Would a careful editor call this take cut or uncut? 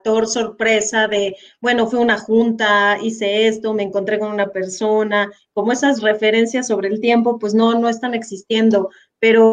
uncut